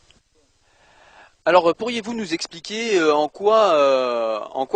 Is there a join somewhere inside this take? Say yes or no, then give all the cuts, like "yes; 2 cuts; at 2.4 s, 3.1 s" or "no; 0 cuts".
no; 0 cuts